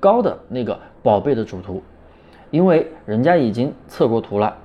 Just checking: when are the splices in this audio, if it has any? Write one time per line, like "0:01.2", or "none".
none